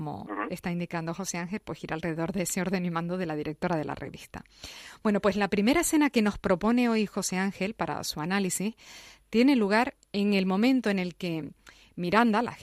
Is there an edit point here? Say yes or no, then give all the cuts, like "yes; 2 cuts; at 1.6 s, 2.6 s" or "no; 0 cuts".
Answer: no; 0 cuts